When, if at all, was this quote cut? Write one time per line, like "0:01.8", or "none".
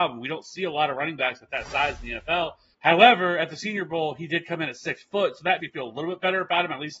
0:02.7
0:05.6